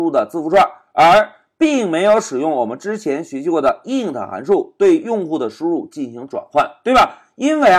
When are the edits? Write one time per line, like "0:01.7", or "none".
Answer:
none

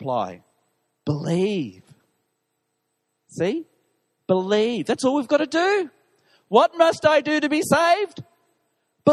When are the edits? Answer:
none

